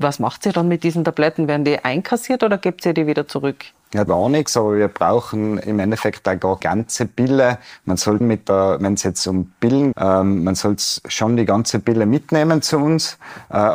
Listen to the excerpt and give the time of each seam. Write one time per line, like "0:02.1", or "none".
0:04.1
0:06.6
0:08.2
0:09.9